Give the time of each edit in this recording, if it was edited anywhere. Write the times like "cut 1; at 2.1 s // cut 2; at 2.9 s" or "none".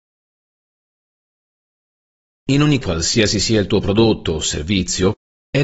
cut 1; at 2.8 s